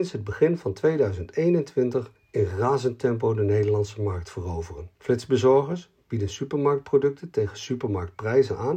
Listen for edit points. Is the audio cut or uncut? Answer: cut